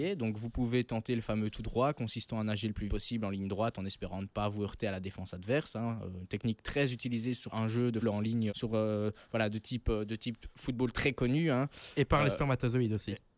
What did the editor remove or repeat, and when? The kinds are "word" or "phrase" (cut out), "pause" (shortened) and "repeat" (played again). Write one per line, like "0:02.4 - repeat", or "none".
0:02.9 - word
0:07.5 - word
0:08.0 - word
0:08.5 - word